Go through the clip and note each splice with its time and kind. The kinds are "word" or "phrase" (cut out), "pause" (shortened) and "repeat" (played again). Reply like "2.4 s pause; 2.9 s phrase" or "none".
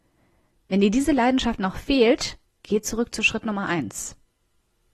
2.4 s pause